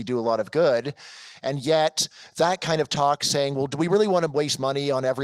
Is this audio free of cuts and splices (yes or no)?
yes